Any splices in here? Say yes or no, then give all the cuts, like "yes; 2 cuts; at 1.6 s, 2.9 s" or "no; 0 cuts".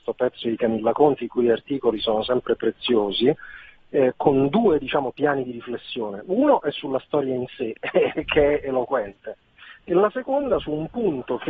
no; 0 cuts